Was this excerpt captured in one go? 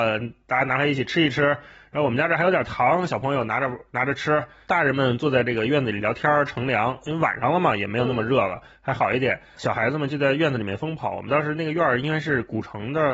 yes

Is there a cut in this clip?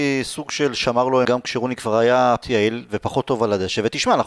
yes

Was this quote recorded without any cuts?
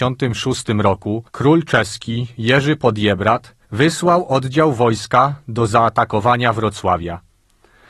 no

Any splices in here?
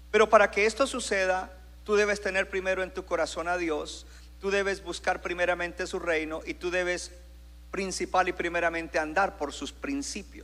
no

